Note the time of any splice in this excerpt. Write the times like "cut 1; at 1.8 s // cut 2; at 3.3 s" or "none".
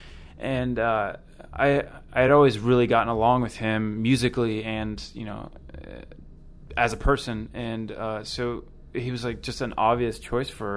none